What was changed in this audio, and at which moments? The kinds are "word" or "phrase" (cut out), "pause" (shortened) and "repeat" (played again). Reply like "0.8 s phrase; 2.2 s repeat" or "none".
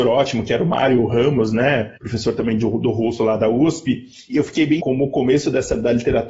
2.0 s pause; 4.3 s word; 4.8 s word

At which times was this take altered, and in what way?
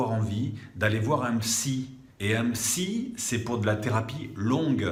2.1 s pause

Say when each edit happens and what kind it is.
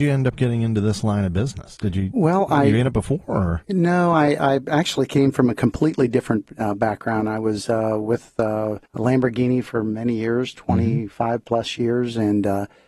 8.9 s pause

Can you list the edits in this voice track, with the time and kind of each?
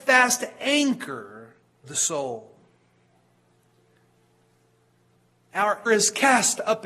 1.8 s word; 5.9 s word

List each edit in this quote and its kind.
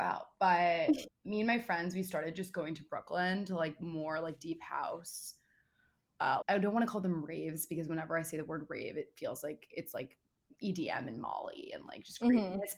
1.1 s word; 6.4 s word

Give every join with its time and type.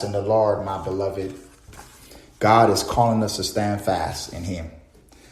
none

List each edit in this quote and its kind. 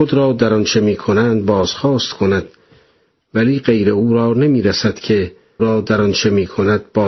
5.6 s word

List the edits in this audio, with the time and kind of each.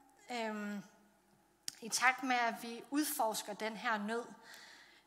none

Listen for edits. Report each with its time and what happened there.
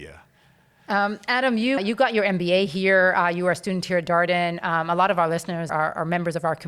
1.8 s word; 5.7 s word

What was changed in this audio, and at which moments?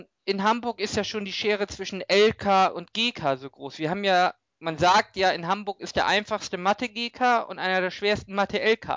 none

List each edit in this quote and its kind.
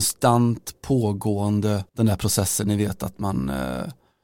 1.9 s pause

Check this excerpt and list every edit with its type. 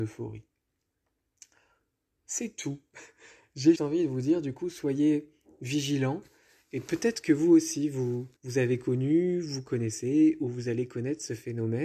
3.8 s word; 8.4 s pause

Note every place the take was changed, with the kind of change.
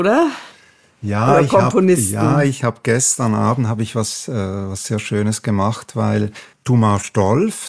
6.5 s pause

